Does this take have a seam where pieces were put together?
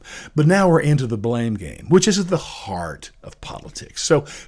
no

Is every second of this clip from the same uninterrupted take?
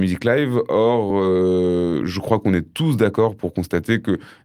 yes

